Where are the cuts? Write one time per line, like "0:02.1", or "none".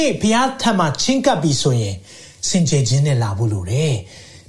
none